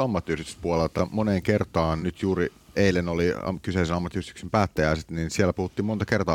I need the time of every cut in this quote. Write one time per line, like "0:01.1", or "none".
0:01.0
0:02.0
0:02.8